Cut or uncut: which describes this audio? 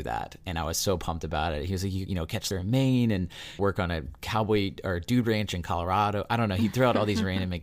cut